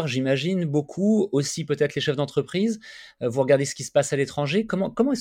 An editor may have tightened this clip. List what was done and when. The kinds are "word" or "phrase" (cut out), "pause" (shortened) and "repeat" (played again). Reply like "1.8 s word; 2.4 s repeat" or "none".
none